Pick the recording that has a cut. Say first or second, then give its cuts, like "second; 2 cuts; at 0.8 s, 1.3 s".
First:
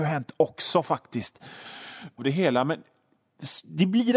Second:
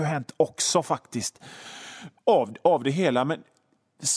first; 1 cut; at 2.2 s